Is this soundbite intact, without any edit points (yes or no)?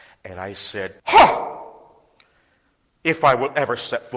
no